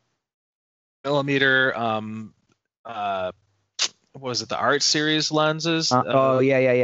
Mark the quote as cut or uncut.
uncut